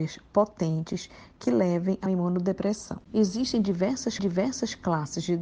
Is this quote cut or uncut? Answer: cut